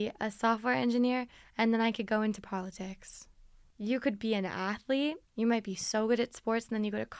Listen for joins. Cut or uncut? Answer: cut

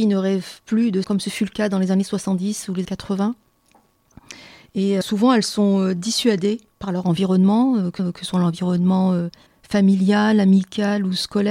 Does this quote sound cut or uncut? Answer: cut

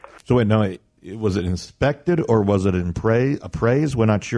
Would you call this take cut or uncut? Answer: uncut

